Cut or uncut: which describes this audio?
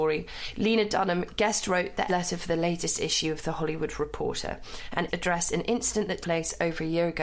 cut